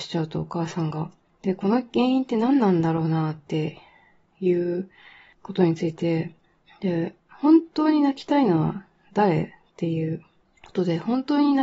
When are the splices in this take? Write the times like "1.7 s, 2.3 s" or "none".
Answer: none

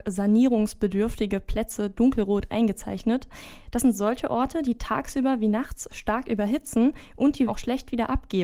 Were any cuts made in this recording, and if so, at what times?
7.5 s

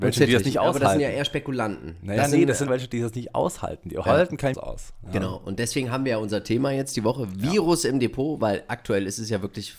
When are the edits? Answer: 2.7 s, 4.5 s

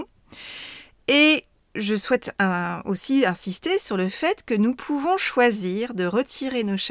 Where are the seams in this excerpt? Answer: none

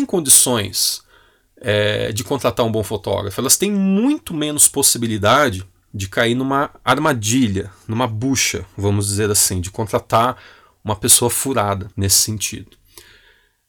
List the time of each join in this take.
11.9 s

